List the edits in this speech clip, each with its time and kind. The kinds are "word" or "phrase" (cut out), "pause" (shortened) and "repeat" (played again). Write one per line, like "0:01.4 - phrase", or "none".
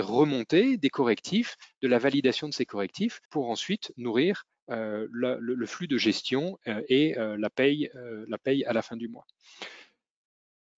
0:03.3 - pause